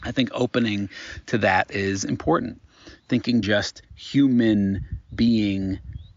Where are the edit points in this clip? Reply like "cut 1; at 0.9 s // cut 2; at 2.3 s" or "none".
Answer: cut 1; at 3.4 s // cut 2; at 3.8 s